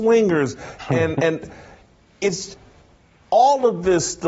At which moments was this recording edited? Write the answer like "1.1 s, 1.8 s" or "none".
1.2 s

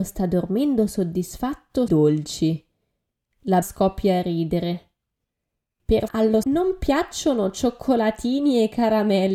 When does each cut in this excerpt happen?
1.9 s, 3.6 s, 6.1 s, 6.4 s

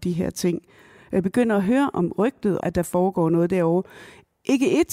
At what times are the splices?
2.6 s

